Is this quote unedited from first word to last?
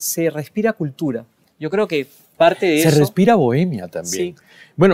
yes; 0 cuts

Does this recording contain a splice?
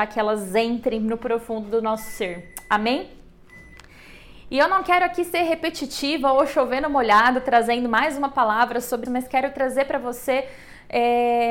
yes; 1 cut; at 9.0 s

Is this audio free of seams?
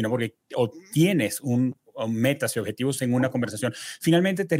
yes; 0 cuts

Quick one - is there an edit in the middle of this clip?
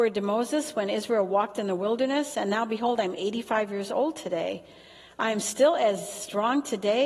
no; 0 cuts

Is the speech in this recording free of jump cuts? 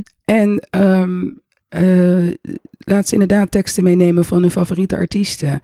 yes; 0 cuts

